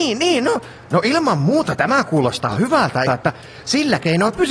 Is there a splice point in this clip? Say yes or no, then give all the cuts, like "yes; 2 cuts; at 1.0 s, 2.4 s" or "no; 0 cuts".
yes; 1 cut; at 3.1 s